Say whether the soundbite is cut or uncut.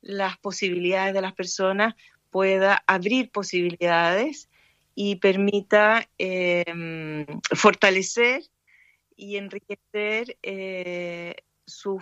uncut